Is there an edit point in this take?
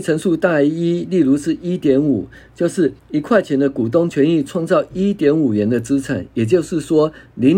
yes; 1 cut; at 3.0 s

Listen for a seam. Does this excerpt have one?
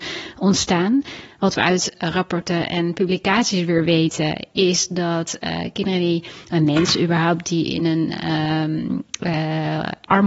no; 0 cuts

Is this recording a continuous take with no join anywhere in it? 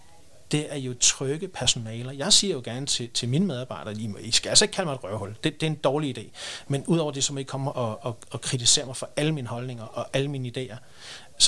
no; 1 cut; at 7.7 s

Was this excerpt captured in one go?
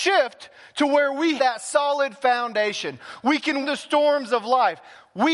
no; 2 cuts; at 1.4 s, 3.6 s

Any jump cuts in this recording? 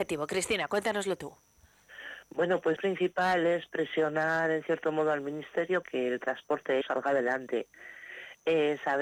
yes; 3 cuts; at 2.8 s, 5.8 s, 6.8 s

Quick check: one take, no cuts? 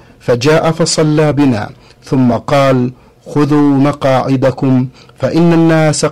yes; 0 cuts

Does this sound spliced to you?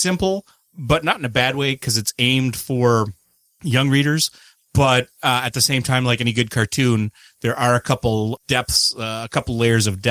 no; 0 cuts

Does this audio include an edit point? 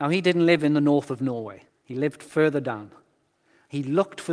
yes; 1 cut; at 1.7 s

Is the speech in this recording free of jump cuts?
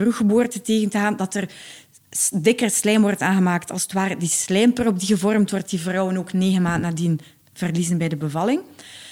yes; 0 cuts

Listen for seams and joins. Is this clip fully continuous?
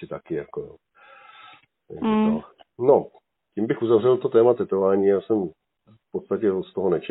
yes; 0 cuts

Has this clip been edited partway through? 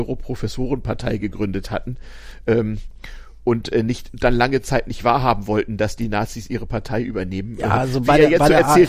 no; 0 cuts

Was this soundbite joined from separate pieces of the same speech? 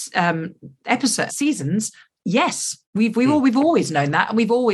yes; 2 cuts; at 1.3 s, 2.8 s

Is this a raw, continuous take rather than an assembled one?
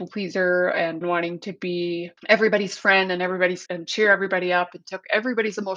no; 3 cuts; at 1.0 s, 2.2 s, 3.7 s

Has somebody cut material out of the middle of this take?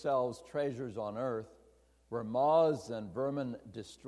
no; 0 cuts

